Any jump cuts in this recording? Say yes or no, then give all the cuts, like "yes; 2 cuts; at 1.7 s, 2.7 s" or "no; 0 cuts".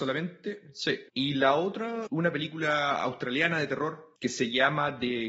yes; 3 cuts; at 1.1 s, 2.1 s, 4.2 s